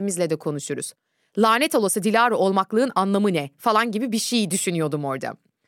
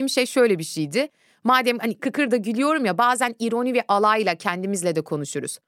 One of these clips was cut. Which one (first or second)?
second